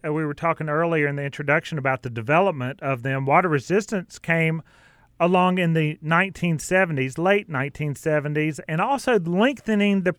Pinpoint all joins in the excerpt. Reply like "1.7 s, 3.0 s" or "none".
none